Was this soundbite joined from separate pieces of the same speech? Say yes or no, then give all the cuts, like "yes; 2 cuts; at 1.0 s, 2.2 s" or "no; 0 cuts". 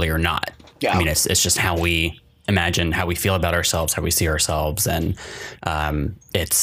no; 0 cuts